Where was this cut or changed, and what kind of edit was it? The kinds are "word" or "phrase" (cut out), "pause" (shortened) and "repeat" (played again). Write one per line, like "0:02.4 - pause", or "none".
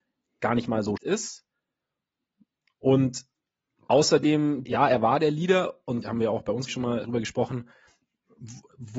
0:01.0 - word
0:04.7 - word
0:06.0 - word
0:06.7 - word
0:07.0 - word